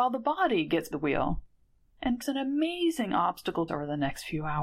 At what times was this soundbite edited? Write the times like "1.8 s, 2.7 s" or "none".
0.9 s, 2.2 s, 3.7 s